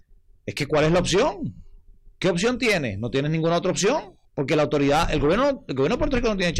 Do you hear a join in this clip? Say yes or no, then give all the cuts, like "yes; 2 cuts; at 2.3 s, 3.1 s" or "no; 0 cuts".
yes; 1 cut; at 4.2 s